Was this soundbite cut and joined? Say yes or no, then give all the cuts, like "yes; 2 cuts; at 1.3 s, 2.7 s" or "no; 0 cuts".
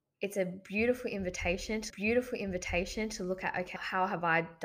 yes; 2 cuts; at 1.9 s, 3.8 s